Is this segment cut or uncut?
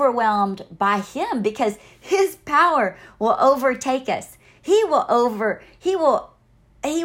uncut